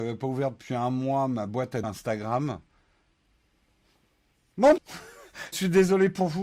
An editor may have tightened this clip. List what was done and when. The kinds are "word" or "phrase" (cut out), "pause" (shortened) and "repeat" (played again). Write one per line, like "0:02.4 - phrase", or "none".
0:01.8 - word
0:04.8 - word
0:05.5 - word